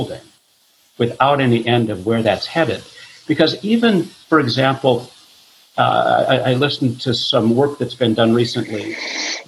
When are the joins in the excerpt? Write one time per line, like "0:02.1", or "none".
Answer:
none